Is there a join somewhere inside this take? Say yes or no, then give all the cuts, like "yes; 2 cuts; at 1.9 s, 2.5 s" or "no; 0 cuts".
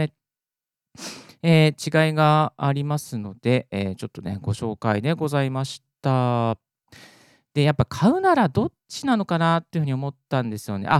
no; 0 cuts